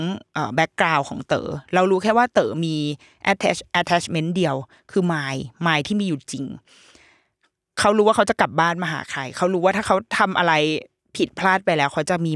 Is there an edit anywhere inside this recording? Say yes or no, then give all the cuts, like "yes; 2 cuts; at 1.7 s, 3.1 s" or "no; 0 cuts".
no; 0 cuts